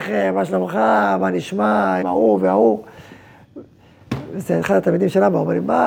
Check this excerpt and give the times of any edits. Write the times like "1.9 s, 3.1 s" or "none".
2.0 s